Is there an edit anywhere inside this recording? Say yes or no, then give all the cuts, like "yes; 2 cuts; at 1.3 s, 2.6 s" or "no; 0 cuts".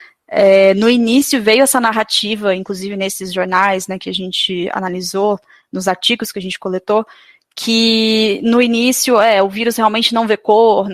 no; 0 cuts